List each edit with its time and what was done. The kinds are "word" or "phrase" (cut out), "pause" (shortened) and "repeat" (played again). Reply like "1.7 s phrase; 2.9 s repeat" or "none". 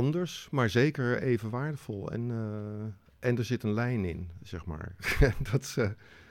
none